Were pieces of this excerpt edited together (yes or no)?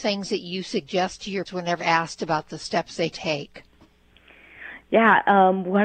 yes